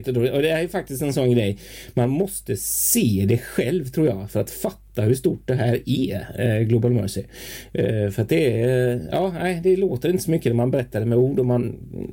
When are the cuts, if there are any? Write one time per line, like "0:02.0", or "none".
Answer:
none